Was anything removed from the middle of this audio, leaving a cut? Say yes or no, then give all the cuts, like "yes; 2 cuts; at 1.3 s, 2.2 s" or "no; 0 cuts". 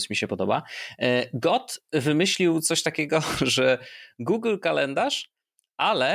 no; 0 cuts